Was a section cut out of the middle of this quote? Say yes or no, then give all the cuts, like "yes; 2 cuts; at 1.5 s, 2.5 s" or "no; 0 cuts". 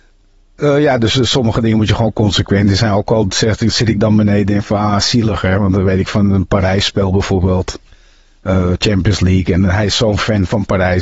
no; 0 cuts